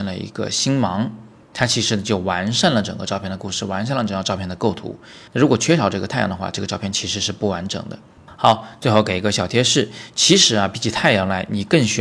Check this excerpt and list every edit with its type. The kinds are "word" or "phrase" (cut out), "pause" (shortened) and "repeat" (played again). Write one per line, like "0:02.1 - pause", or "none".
0:05.3 - pause